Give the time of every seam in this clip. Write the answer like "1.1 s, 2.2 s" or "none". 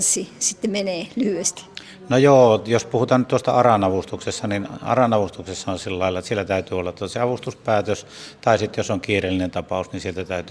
none